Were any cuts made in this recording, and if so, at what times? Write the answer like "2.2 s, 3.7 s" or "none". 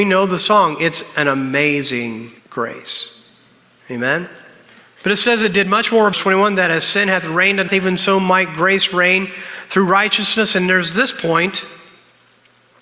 2.4 s, 4.8 s, 6.1 s, 7.7 s